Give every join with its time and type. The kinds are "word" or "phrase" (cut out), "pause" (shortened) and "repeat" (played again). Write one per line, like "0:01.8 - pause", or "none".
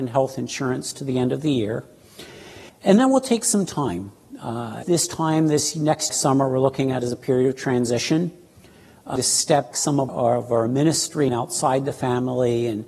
0:02.7 - pause
0:04.8 - word
0:06.1 - phrase
0:09.2 - word
0:09.7 - word
0:10.1 - word
0:11.3 - word